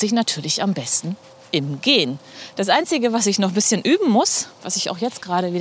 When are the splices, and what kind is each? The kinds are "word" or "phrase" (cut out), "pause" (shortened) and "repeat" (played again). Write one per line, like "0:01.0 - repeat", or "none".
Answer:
none